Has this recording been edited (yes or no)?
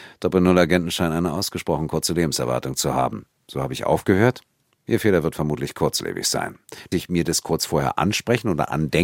yes